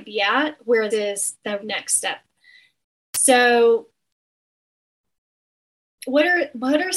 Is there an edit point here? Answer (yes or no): yes